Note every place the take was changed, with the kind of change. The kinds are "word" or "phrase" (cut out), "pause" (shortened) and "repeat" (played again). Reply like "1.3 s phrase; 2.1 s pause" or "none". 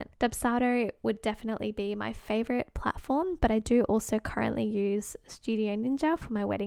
none